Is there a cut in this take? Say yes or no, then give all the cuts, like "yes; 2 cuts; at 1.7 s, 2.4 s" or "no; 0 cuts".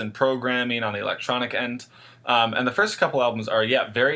no; 0 cuts